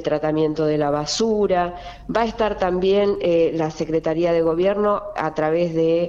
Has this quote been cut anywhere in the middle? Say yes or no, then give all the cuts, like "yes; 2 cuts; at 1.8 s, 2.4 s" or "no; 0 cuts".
no; 0 cuts